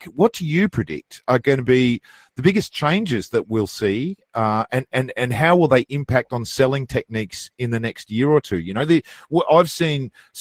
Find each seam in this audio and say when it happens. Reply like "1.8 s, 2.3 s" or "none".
none